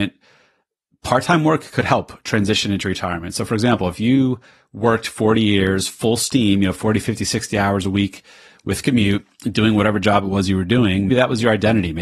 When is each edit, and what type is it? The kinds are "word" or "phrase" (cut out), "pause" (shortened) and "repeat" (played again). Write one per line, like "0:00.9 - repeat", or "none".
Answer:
0:11.1 - word